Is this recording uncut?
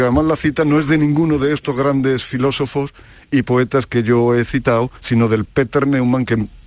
no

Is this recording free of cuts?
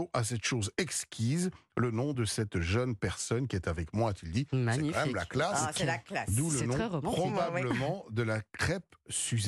yes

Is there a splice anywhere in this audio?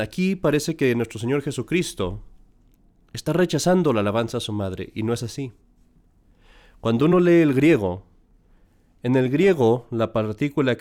no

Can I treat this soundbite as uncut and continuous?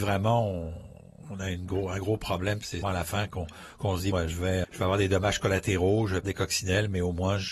no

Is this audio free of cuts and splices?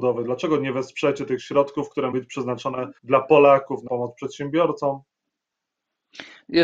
no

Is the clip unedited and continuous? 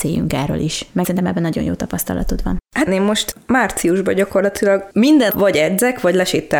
no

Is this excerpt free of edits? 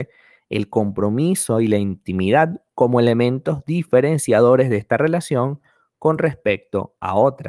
yes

